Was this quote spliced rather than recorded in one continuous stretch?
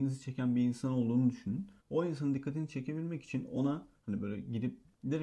yes; 2 cuts; at 1.8 s, 4.0 s

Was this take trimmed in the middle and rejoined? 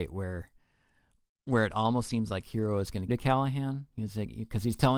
yes; 1 cut; at 3.1 s

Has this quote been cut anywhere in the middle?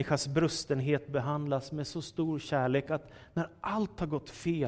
no; 0 cuts

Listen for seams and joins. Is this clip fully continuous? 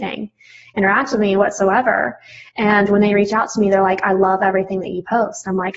yes; 0 cuts

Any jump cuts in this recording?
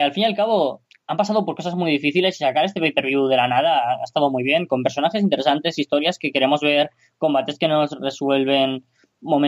no; 0 cuts

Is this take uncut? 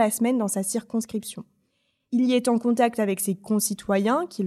yes; 0 cuts

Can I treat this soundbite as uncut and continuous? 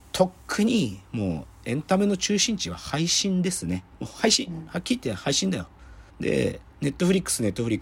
no; 2 cuts; at 3.9 s, 6.1 s

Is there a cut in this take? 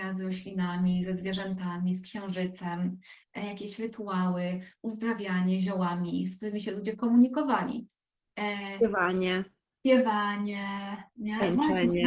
no; 0 cuts

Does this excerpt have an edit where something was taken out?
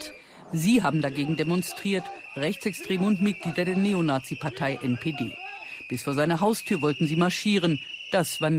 no; 0 cuts

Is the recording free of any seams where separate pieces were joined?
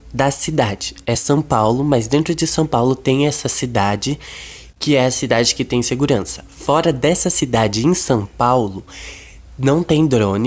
yes; 0 cuts

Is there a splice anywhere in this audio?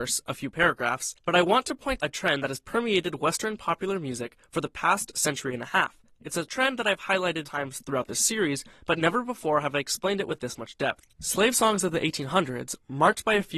yes; 2 cuts; at 2.0 s, 7.4 s

